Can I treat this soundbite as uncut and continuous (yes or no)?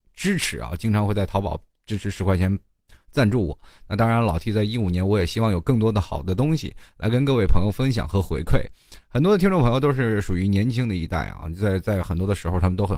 yes